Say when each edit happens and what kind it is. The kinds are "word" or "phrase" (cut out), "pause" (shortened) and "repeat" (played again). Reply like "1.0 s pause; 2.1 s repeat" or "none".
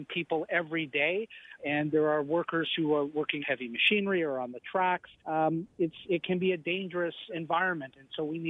1.6 s word; 3.4 s word; 5.2 s pause; 6.0 s word; 7.3 s word